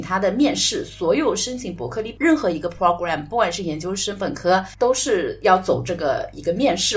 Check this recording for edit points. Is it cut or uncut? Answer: uncut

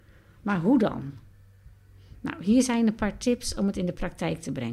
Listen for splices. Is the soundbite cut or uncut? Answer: uncut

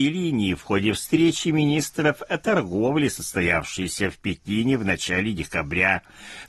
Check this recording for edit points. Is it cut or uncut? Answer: uncut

